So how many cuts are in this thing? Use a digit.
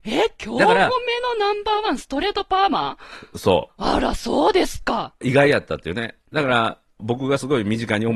1